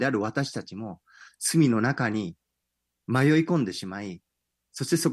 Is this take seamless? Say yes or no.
yes